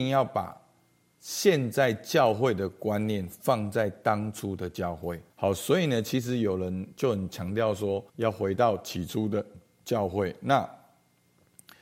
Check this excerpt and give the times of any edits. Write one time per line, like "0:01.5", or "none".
0:05.3
0:08.1